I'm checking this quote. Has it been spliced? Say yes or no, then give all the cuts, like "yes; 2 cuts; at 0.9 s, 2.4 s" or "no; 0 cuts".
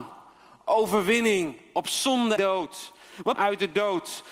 yes; 2 cuts; at 2.4 s, 3.3 s